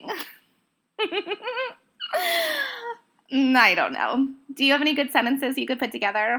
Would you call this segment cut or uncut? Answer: uncut